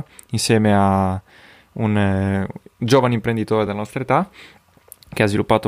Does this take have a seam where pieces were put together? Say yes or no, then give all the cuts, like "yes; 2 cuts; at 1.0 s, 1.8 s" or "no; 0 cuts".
no; 0 cuts